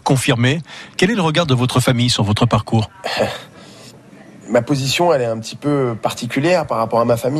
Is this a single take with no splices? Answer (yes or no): yes